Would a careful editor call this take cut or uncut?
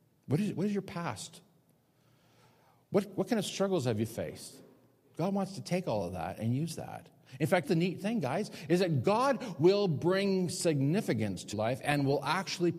cut